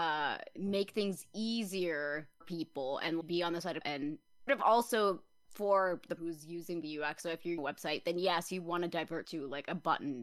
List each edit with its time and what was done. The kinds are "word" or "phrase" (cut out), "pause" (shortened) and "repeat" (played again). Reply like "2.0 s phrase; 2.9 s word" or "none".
2.4 s word; 3.2 s word; 3.8 s word; 4.5 s word; 6.2 s word; 7.6 s word; 9.2 s word